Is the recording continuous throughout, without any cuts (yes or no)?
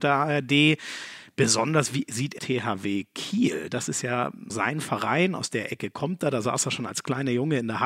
no